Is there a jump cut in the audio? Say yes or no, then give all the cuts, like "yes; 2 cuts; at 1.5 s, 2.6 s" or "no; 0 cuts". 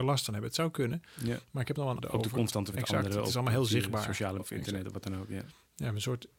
yes; 3 cuts; at 2.0 s, 2.7 s, 4.4 s